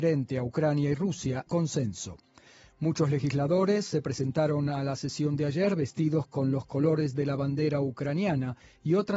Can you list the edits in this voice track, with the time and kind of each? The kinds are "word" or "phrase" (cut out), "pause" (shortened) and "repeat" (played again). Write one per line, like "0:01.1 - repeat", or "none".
0:01.5 - word